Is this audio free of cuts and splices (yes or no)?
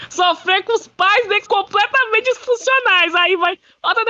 no